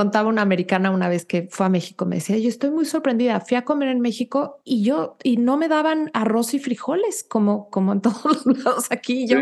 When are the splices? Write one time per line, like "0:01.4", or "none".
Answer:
0:04.6